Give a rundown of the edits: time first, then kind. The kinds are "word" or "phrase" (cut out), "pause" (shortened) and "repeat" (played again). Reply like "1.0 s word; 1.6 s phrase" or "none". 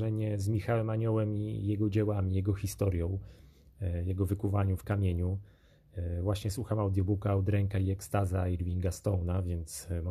4.8 s word